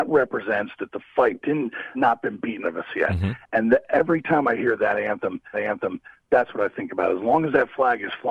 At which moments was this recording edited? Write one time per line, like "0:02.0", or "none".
0:01.4
0:01.9
0:02.6
0:05.5